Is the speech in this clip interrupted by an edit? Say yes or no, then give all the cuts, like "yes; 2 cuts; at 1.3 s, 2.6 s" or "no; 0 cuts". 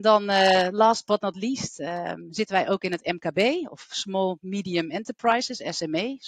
no; 0 cuts